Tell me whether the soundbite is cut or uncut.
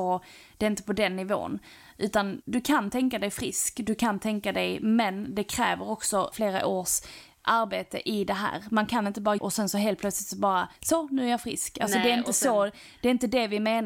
cut